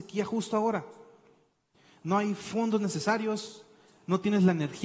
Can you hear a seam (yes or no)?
no